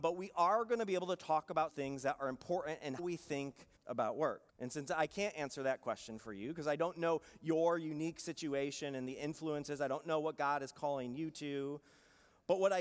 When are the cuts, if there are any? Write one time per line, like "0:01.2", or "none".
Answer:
0:01.7
0:03.0
0:03.8
0:04.5